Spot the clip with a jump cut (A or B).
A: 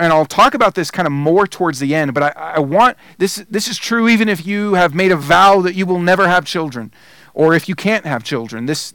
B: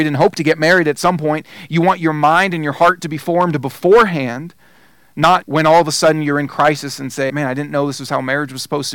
B